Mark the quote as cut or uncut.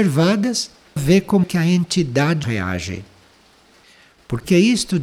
cut